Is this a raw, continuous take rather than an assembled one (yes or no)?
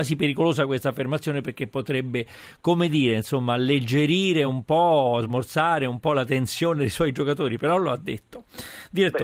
yes